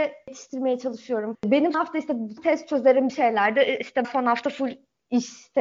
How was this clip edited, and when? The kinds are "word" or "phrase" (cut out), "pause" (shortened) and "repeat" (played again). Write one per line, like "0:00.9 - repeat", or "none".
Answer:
0:01.3 - word
0:01.7 - word
0:02.4 - word
0:03.1 - word
0:04.0 - word

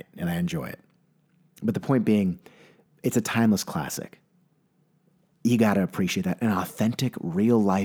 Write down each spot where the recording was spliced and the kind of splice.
none

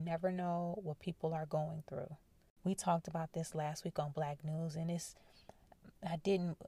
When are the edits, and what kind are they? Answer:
none

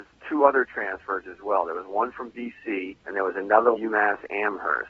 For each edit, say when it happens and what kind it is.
0:03.0 - pause
0:03.7 - phrase

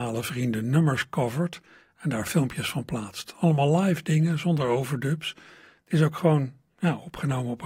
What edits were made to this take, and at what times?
none

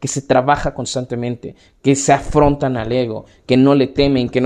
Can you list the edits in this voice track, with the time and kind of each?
none

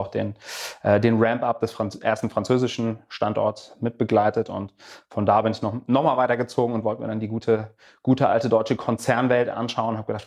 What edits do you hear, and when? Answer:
none

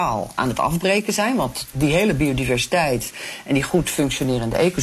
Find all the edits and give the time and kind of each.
none

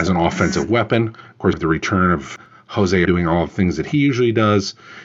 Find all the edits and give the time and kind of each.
0:01.5 - word
0:03.1 - word

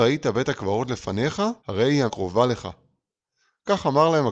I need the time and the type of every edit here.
0:01.6 - pause
0:02.1 - word

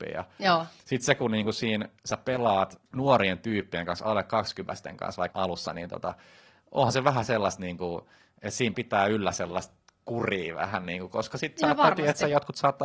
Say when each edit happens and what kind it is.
0:02.0 - pause
0:02.9 - pause
0:05.3 - word
0:08.7 - word

